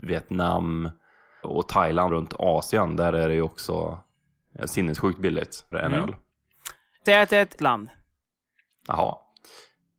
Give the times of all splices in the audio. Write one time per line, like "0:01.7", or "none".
0:01.4
0:02.1
0:04.6
0:05.7
0:07.1
0:07.6